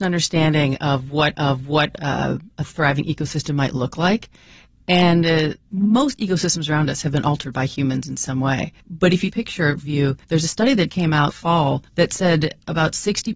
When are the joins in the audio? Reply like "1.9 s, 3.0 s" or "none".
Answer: 1.3 s, 5.6 s, 8.8 s, 9.3 s, 10.2 s, 10.9 s, 11.3 s, 11.9 s